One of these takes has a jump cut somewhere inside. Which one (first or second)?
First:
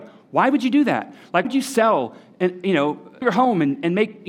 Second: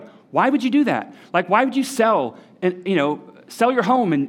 first